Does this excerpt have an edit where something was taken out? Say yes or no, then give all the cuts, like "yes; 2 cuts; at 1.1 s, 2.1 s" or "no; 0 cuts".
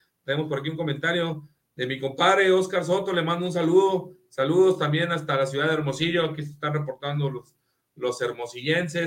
no; 0 cuts